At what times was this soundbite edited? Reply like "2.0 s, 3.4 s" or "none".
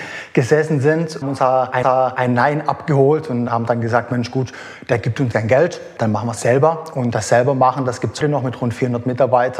1.2 s, 1.8 s, 5.3 s, 6.4 s, 8.2 s